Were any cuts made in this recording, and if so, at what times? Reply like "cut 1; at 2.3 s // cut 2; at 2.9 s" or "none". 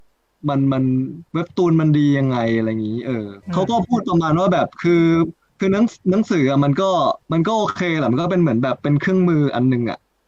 cut 1; at 1.3 s // cut 2; at 3.4 s // cut 3; at 7.2 s